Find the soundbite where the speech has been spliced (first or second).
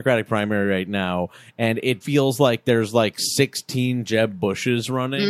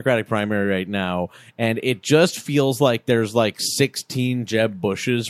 first